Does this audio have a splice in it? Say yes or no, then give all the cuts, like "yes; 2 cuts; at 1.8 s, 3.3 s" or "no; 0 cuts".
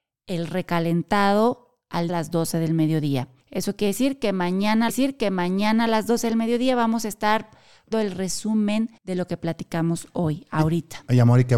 yes; 5 cuts; at 2.1 s, 3.4 s, 4.9 s, 7.9 s, 9.0 s